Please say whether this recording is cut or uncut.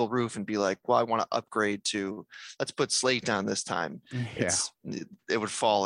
uncut